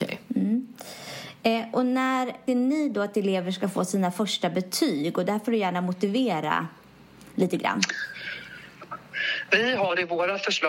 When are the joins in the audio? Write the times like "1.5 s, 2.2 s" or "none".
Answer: 2.5 s, 7.3 s